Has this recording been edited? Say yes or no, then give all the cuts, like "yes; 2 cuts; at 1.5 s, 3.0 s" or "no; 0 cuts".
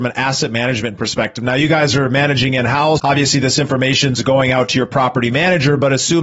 yes; 1 cut; at 3.0 s